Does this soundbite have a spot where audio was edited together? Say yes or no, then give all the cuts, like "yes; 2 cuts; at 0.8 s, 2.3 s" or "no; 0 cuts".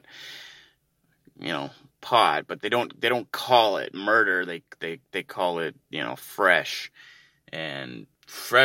no; 0 cuts